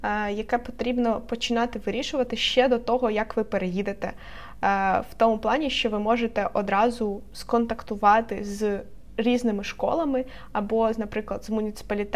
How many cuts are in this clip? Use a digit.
0